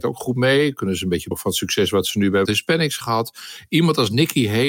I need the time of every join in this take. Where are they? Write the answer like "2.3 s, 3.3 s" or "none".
1.3 s, 2.5 s, 3.0 s